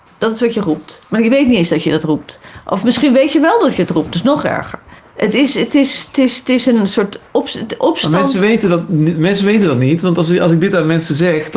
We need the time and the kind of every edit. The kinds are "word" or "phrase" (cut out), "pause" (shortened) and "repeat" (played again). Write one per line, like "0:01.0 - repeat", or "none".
0:05.0 - pause